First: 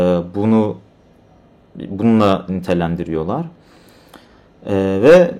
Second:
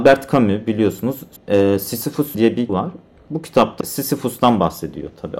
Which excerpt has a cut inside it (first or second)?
second